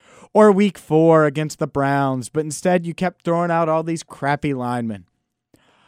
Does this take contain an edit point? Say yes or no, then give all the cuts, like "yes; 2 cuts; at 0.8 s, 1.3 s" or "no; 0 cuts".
no; 0 cuts